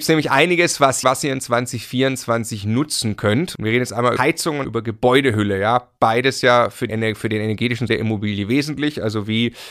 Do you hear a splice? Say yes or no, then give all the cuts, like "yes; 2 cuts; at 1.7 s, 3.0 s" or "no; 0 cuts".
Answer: yes; 5 cuts; at 1.0 s, 4.2 s, 4.6 s, 6.9 s, 7.9 s